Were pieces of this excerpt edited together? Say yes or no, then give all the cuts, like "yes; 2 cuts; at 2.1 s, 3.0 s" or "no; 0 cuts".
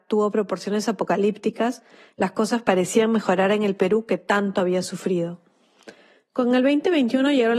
no; 0 cuts